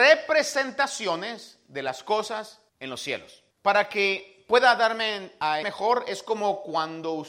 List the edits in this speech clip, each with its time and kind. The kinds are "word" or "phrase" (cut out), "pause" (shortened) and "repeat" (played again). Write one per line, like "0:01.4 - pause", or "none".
0:02.7 - pause
0:03.5 - pause
0:05.6 - word